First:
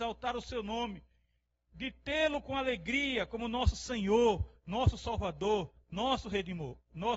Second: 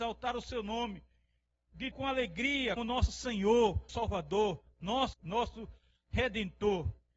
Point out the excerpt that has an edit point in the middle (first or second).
second